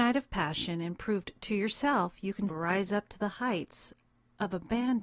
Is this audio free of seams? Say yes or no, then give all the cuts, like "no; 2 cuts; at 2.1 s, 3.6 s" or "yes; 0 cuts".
no; 1 cut; at 2.5 s